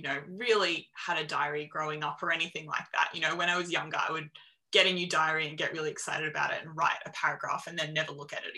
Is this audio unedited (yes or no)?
yes